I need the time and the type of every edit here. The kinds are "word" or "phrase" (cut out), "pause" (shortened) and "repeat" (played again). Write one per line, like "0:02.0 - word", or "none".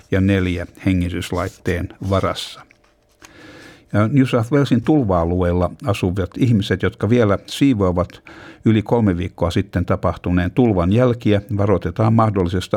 none